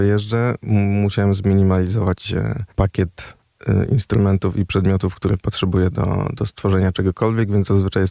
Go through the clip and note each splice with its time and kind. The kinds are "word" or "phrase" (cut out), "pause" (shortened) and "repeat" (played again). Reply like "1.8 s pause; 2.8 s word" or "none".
5.1 s word